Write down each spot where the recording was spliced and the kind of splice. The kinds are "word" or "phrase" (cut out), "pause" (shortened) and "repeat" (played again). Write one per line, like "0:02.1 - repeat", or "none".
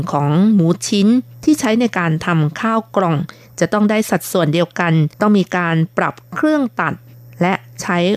0:05.1 - pause